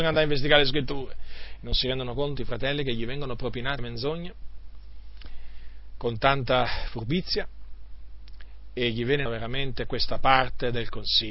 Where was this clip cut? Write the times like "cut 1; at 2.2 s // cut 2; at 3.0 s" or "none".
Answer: cut 1; at 2.4 s // cut 2; at 3.8 s // cut 3; at 9.3 s